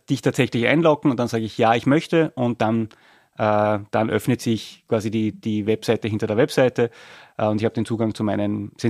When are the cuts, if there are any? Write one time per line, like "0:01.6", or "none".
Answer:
none

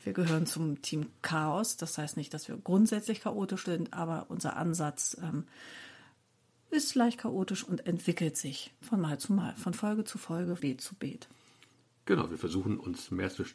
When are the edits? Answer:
0:08.8
0:10.6

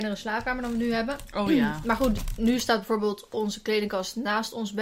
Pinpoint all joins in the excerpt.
none

